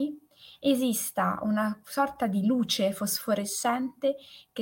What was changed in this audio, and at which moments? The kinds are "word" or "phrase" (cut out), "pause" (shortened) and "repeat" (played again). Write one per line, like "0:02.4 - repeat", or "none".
none

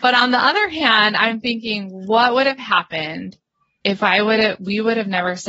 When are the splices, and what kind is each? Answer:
none

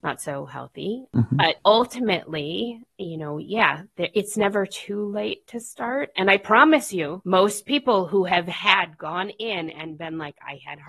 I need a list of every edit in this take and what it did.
none

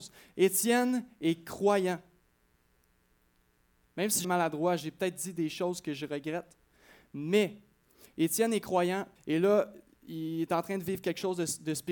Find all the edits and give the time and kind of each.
0:04.2 - word
0:09.2 - pause

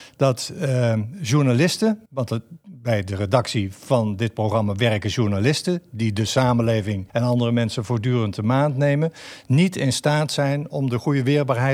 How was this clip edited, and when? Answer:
0:02.1 - pause
0:07.1 - pause

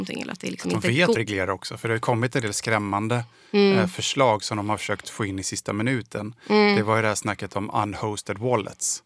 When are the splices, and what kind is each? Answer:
0:01.1 - phrase

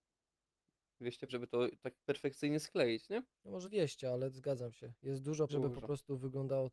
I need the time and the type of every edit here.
0:01.3 - word
0:02.0 - pause
0:03.3 - pause
0:03.6 - word
0:05.5 - word

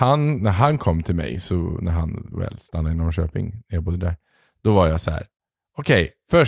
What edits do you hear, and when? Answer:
none

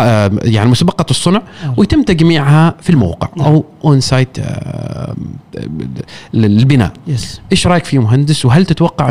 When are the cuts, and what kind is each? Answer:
none

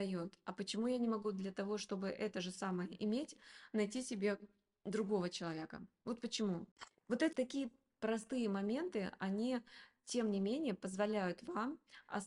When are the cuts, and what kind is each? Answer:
0:07.3 - word

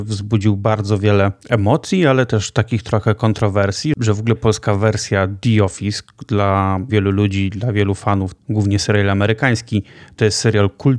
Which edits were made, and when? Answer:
0:01.4 - pause
0:04.3 - word
0:06.9 - word

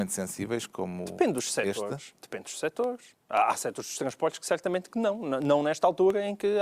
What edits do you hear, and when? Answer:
0:03.2 - pause

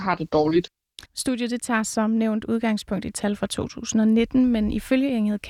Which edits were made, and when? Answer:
0:01.1 - pause

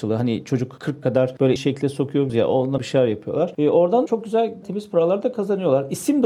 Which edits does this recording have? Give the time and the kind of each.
0:01.0 - word
0:01.6 - word
0:02.3 - word
0:02.8 - word
0:04.1 - word
0:04.6 - word

